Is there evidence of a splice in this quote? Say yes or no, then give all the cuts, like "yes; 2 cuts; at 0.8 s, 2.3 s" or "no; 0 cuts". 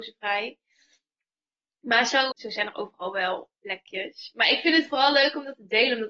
yes; 1 cut; at 2.3 s